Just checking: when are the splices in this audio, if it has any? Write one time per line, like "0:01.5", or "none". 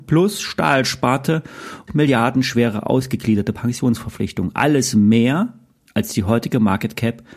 0:01.9

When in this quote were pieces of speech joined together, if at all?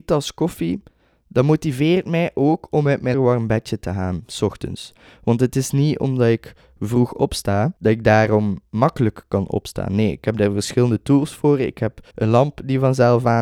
0:03.1
0:07.8
0:12.1

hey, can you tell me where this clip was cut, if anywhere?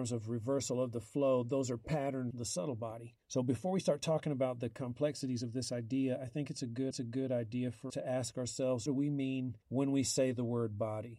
0:02.3
0:03.2
0:06.9
0:07.9
0:08.9
0:09.6

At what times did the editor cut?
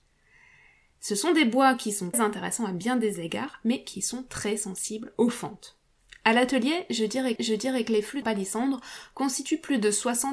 0:02.1
0:07.4
0:08.2

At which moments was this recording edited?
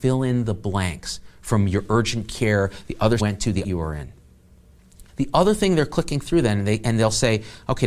0:03.2
0:03.6
0:05.1

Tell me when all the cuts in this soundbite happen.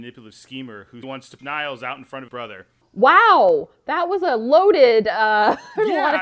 0:01.0
0:01.4
0:02.3
0:02.8

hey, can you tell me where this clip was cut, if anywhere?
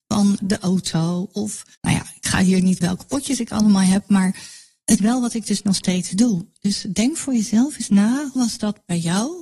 0:01.7
0:02.8
0:05.0
0:08.4

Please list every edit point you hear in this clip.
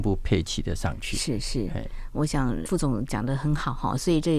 0:02.7

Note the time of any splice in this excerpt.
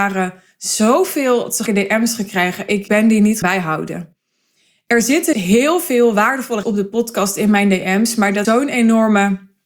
0:01.7
0:02.9
0:03.4
0:05.3
0:06.6
0:08.4

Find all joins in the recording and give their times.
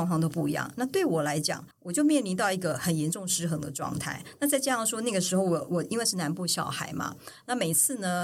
0:01.7

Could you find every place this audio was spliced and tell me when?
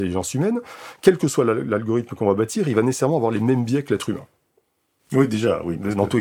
none

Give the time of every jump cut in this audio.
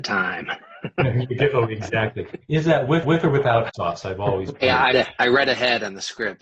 0:03.0
0:03.7
0:04.9

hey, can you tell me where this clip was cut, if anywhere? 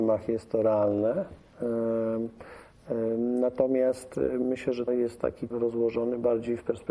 0:04.9
0:05.5

